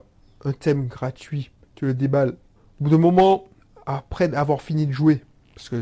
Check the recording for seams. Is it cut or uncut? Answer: uncut